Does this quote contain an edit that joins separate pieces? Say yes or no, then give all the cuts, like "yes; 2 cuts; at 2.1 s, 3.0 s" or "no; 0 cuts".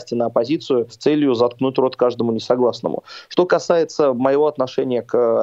no; 0 cuts